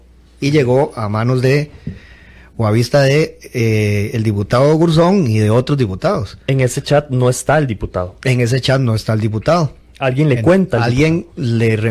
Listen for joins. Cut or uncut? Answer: uncut